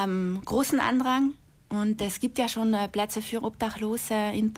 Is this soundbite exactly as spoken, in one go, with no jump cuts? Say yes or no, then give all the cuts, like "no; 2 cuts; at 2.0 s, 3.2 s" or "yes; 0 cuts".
yes; 0 cuts